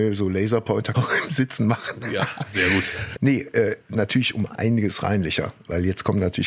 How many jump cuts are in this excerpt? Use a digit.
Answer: 3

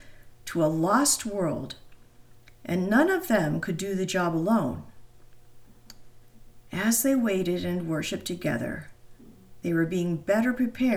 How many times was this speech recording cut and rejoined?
1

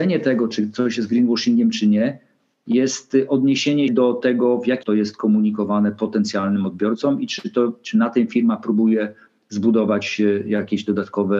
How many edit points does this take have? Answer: 2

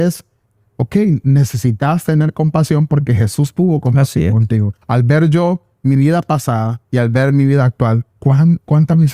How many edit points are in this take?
3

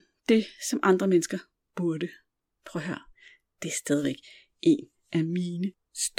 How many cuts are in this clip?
0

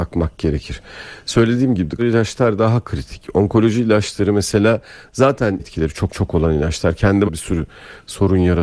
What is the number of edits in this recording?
4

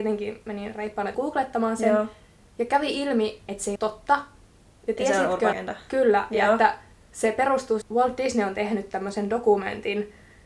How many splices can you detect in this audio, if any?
4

